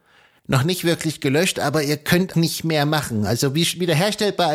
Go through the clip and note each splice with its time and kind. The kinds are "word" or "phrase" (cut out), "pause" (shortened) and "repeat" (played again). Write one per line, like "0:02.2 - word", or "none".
0:02.3 - word